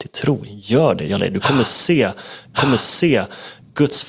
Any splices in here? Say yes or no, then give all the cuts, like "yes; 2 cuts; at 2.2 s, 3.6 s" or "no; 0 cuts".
yes; 2 cuts; at 1.2 s, 2.5 s